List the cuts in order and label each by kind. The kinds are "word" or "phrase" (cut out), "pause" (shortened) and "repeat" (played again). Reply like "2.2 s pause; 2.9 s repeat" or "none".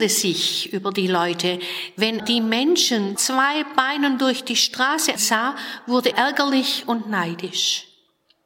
2.2 s word; 3.2 s phrase; 5.2 s word; 6.1 s word